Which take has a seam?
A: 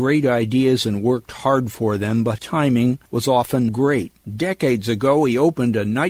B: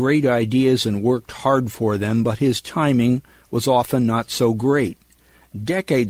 A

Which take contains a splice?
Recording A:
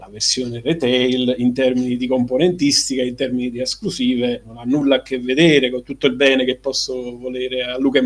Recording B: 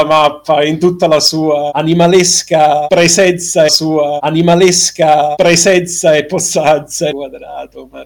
B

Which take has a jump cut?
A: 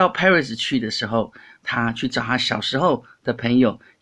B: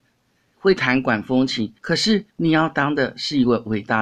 B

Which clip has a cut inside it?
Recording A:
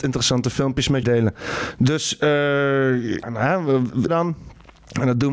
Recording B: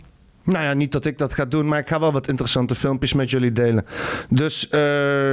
A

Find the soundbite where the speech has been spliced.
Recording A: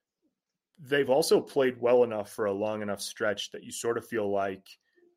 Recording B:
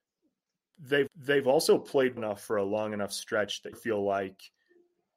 B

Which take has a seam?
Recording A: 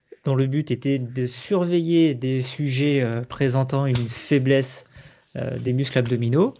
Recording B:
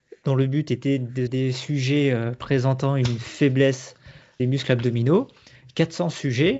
B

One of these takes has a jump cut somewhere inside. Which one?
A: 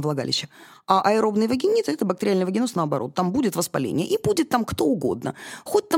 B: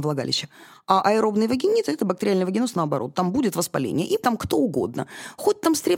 B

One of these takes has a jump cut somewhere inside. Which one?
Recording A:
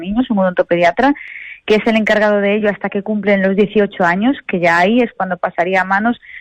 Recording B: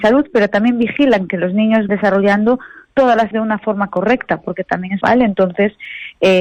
B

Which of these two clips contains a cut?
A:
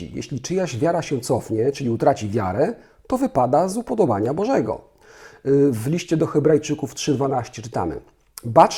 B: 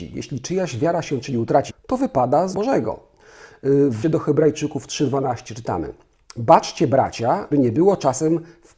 B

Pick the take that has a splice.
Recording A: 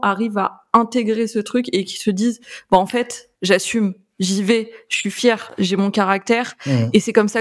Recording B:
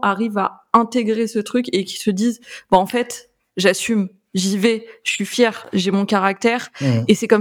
A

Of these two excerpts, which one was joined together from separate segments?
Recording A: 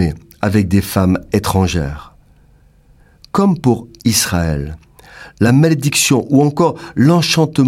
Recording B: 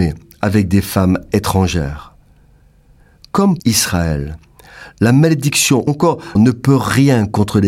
B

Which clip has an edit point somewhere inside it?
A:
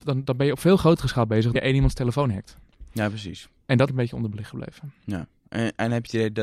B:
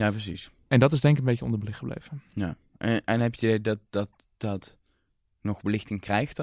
A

